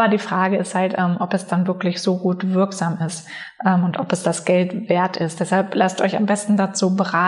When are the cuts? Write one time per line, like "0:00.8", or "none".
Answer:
none

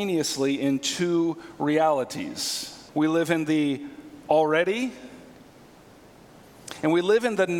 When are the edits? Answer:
0:02.9

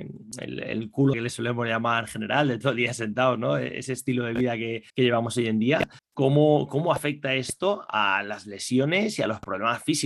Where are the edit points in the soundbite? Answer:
0:01.1
0:04.9
0:06.0

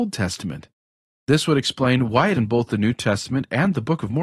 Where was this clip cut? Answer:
0:02.3

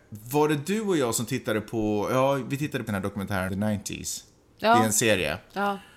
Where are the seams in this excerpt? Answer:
0:02.9
0:03.5

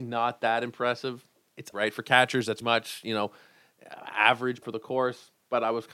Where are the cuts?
0:01.7
0:02.6
0:04.6

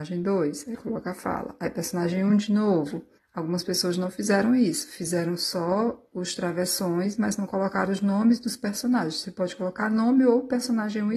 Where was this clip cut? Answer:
0:03.2

